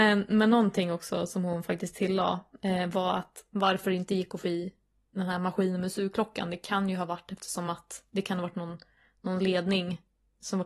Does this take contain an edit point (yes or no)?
no